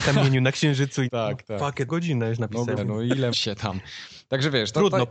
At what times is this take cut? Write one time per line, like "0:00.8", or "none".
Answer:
0:01.1
0:01.9
0:02.8
0:03.3